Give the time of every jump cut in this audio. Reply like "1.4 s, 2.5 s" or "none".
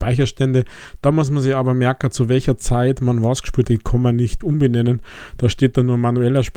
3.6 s, 4.4 s